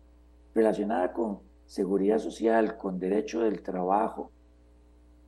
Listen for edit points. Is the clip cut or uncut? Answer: uncut